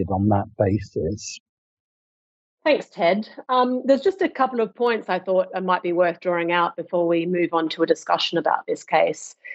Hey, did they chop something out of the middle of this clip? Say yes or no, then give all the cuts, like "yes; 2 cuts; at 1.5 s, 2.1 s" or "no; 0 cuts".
no; 0 cuts